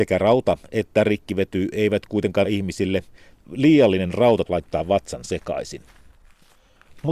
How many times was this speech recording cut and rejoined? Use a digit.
2